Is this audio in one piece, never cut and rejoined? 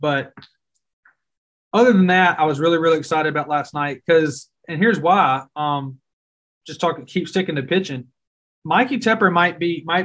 yes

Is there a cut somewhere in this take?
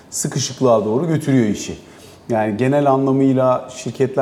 no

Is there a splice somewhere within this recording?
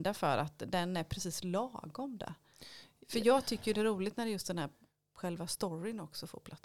no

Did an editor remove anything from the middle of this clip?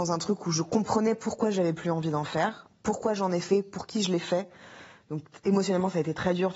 no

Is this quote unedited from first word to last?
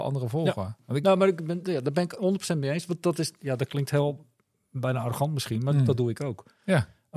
yes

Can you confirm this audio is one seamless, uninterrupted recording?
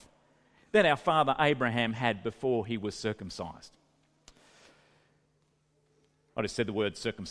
yes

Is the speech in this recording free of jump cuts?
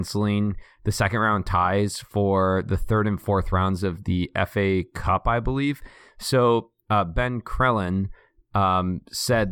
yes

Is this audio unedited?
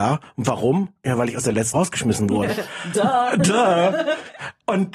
no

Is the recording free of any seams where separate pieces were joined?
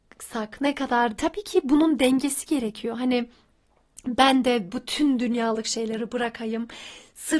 no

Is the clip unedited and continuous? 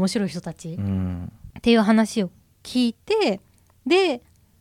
yes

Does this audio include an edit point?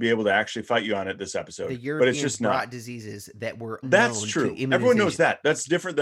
yes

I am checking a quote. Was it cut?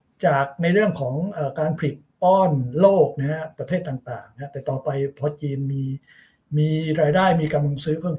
no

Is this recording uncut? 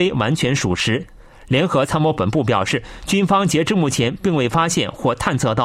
yes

